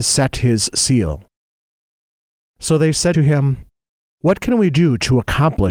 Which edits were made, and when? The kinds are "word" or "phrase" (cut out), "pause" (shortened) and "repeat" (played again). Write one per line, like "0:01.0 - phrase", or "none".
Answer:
0:03.1 - word